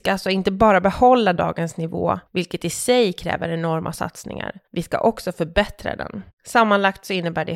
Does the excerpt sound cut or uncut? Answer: cut